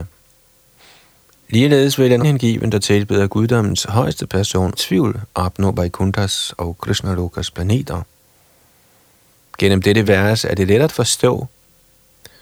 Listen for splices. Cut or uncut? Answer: cut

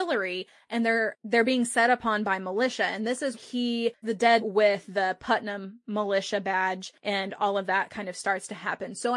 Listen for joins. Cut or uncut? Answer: cut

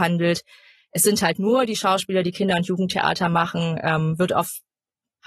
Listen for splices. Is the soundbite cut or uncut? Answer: uncut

